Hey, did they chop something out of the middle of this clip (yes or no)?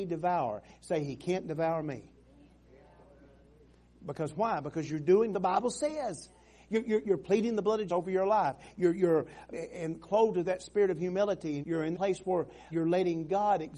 yes